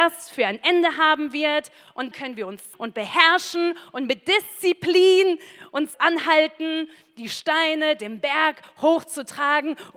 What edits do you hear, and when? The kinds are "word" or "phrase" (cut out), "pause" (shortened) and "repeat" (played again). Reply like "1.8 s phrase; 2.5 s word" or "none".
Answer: 2.1 s word; 2.7 s word; 5.9 s word